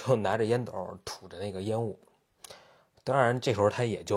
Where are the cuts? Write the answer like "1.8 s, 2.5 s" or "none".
none